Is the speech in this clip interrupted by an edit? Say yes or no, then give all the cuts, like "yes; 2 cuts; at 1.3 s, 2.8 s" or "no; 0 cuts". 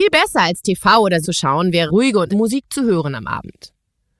yes; 3 cuts; at 1.2 s, 1.9 s, 2.3 s